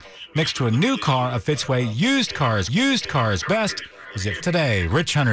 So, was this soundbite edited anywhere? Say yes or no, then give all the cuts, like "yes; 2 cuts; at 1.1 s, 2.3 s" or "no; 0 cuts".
yes; 2 cuts; at 2.7 s, 4.4 s